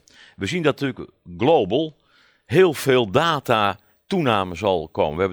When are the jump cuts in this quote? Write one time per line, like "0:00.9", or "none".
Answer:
none